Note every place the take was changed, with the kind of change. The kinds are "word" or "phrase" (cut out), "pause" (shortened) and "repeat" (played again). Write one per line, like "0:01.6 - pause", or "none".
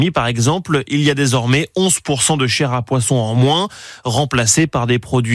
none